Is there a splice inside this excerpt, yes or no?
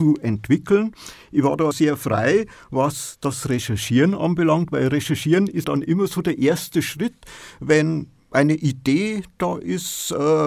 yes